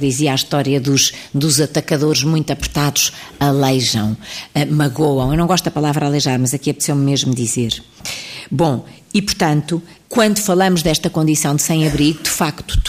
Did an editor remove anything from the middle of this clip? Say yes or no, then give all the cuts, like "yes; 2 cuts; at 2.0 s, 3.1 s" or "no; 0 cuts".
no; 0 cuts